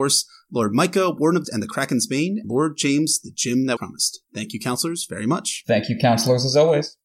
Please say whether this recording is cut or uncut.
cut